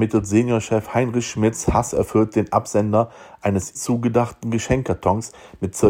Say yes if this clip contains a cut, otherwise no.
yes